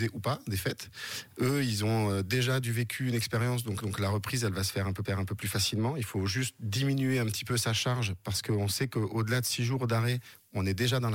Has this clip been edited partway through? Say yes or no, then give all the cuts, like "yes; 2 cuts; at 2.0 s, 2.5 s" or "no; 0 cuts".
yes; 2 cuts; at 3.8 s, 5.0 s